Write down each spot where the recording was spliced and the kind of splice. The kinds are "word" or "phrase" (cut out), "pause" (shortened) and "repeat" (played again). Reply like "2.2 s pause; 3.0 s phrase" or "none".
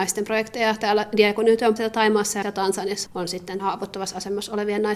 1.8 s word; 2.4 s word; 3.1 s word; 3.6 s word